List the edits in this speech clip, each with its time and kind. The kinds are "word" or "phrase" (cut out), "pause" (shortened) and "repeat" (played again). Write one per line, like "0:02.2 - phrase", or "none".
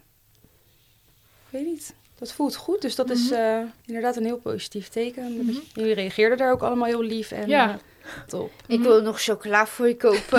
0:02.0 - pause
0:03.8 - pause
0:08.3 - word